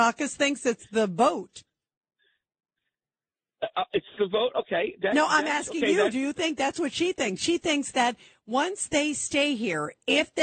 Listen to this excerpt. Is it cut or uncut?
uncut